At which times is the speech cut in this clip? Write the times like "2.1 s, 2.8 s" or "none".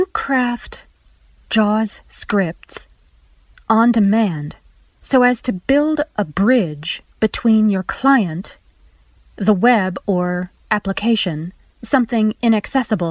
none